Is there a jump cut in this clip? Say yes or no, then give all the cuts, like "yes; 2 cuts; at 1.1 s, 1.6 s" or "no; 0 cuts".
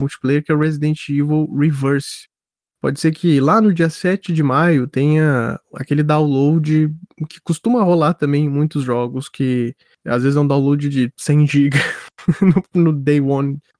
no; 0 cuts